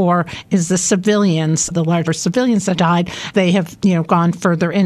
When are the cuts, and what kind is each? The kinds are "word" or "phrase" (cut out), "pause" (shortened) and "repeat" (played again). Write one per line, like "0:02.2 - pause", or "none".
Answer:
0:01.7 - word
0:02.1 - word
0:02.7 - word
0:03.3 - word